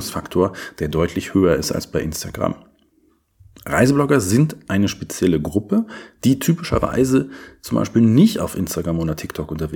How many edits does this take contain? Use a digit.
0